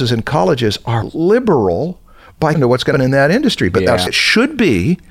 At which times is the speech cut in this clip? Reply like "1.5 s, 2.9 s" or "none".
1.0 s, 2.5 s, 2.9 s, 4.1 s